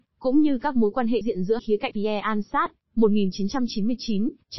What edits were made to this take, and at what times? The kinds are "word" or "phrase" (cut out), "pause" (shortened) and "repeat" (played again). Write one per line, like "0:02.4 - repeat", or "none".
0:01.2 - word
0:01.6 - word
0:01.9 - word